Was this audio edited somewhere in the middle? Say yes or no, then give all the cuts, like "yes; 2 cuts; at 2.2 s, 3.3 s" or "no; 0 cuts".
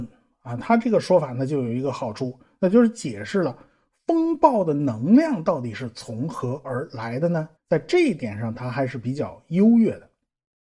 yes; 1 cut; at 7.6 s